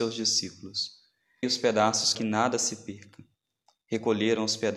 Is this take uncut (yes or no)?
no